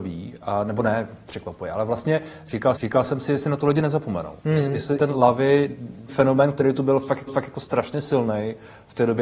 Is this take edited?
yes; 4 cuts; at 2.8 s, 4.4 s, 6.1 s, 7.3 s

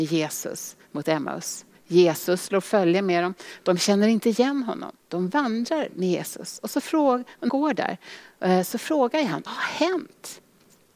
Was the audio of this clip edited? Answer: yes; 4 cuts; at 1.7 s, 5.0 s, 7.5 s, 9.5 s

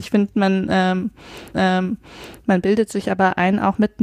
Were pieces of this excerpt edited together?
yes; 1 cut; at 1.5 s

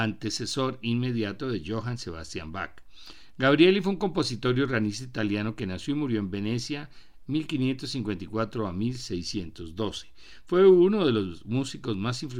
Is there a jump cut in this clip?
no; 0 cuts

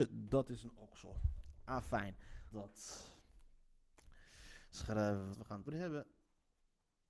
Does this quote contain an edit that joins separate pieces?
yes; 3 cuts; at 2.5 s, 5.3 s, 5.7 s

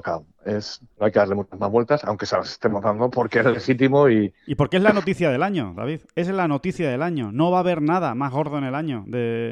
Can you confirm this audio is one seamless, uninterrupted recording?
no; 2 cuts; at 0.9 s, 3.1 s

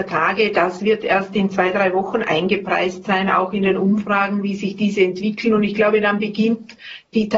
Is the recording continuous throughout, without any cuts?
yes; 0 cuts

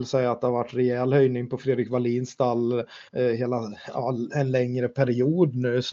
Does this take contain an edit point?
yes; 1 cut; at 3.1 s

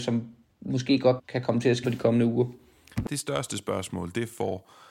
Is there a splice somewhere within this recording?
yes; 2 cuts; at 1.2 s, 1.8 s

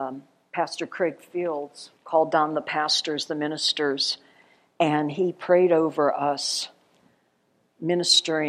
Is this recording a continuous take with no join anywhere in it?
no; 1 cut; at 2.0 s

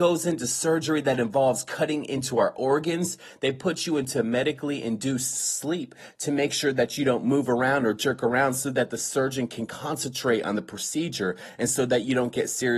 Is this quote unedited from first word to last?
yes; 0 cuts

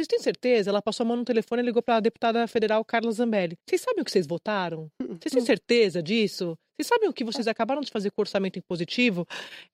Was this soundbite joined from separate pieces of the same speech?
yes; 1 cut; at 3.6 s

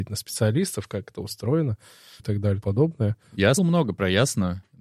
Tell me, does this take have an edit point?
yes; 3 cuts; at 2.2 s, 2.6 s, 3.6 s

